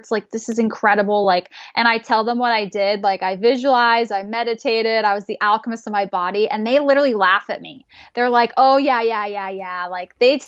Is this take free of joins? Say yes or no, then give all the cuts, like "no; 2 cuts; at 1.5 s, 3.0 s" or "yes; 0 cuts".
yes; 0 cuts